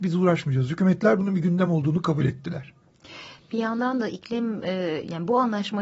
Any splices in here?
no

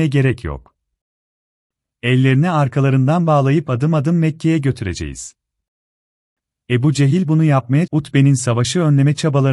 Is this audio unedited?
no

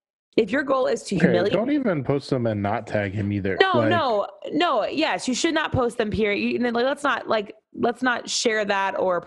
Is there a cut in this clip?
yes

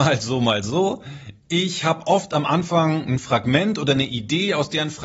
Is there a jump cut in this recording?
no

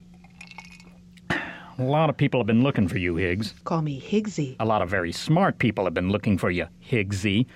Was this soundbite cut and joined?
no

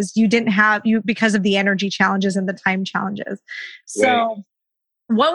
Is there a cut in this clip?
no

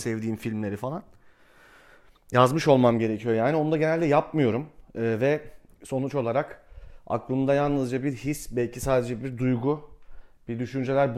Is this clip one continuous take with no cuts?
yes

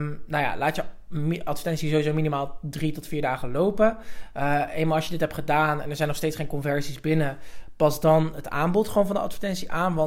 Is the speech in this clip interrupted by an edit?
no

